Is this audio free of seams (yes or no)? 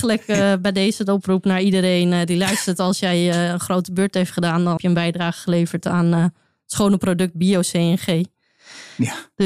no